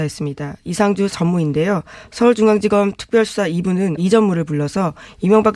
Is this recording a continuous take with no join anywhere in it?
no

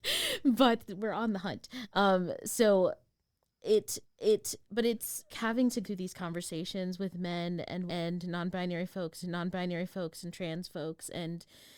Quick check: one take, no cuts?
no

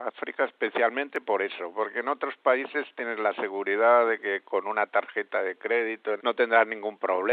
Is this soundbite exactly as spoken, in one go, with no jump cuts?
no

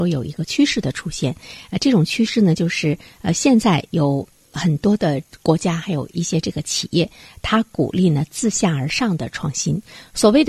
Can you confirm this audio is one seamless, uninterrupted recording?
yes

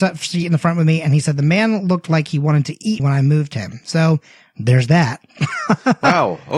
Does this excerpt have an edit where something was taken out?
yes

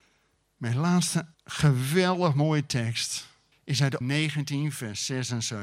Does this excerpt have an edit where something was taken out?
yes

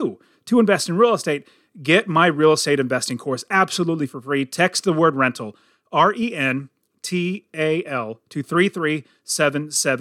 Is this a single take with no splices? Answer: yes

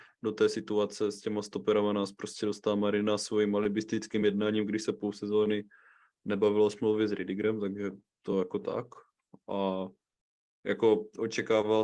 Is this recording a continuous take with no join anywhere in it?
yes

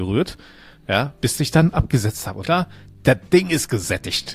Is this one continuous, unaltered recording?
no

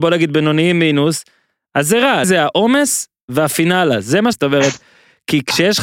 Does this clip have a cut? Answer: yes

